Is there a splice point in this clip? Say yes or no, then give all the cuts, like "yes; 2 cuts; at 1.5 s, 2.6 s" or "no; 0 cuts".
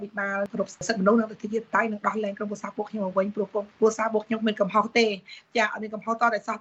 yes; 1 cut; at 3.7 s